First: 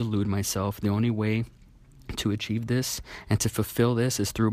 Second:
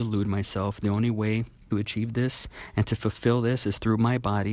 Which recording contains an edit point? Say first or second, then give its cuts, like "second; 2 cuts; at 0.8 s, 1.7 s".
second; 1 cut; at 1.7 s